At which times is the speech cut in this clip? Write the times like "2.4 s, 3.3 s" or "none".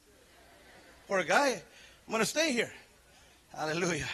none